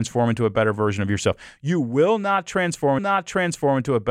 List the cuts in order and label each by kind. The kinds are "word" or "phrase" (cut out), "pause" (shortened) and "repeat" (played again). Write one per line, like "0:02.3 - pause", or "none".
0:03.0 - repeat